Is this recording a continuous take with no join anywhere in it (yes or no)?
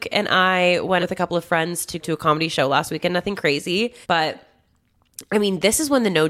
no